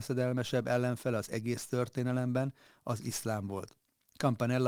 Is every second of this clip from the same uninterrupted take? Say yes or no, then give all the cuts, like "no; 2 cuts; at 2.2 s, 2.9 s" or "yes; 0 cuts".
yes; 0 cuts